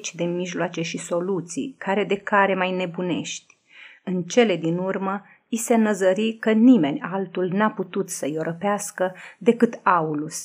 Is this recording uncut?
yes; 0 cuts

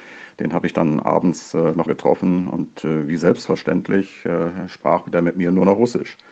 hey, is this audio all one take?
no; 1 cut; at 1.9 s

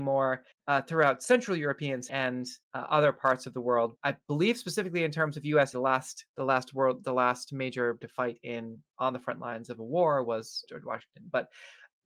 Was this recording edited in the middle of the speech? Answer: yes; 7 cuts; at 2.1 s, 2.6 s, 4.0 s, 5.7 s, 6.3 s, 8.0 s, 10.7 s

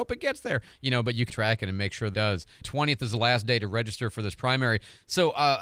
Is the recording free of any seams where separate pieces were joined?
no; 2 cuts; at 1.3 s, 2.1 s

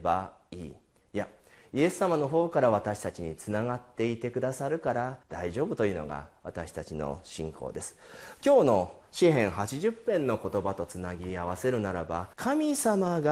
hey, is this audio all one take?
no; 2 cuts; at 5.2 s, 12.3 s

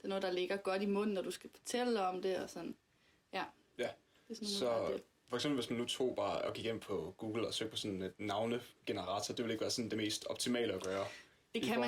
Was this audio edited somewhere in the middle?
no; 0 cuts

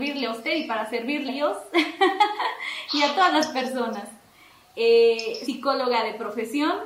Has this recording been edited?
yes; 2 cuts; at 1.3 s, 5.5 s

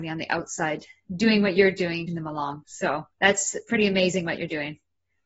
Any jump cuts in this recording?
yes; 2 cuts; at 2.1 s, 3.1 s

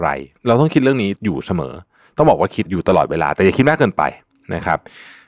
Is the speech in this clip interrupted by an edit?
no; 0 cuts

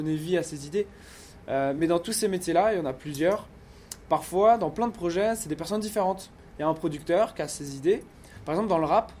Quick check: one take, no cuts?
yes; 0 cuts

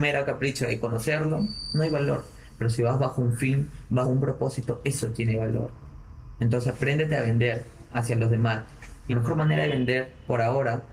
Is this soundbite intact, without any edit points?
no; 2 cuts; at 4.0 s, 9.1 s

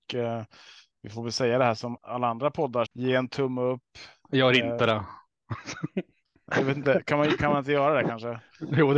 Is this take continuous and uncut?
no; 2 cuts; at 2.0 s, 2.9 s

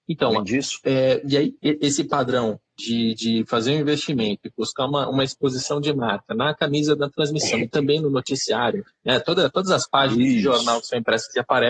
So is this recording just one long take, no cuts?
no; 2 cuts; at 1.6 s, 2.7 s

